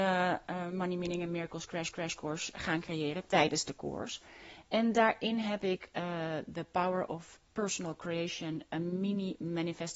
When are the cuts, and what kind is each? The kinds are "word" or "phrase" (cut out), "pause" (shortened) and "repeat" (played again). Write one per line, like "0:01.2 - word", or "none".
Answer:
0:01.9 - repeat